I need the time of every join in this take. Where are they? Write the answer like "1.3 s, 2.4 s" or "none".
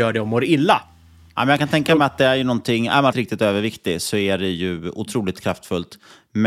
3.1 s